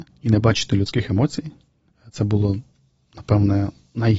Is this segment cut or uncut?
uncut